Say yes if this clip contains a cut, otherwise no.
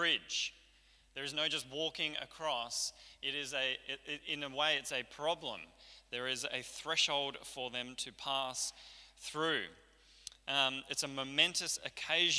no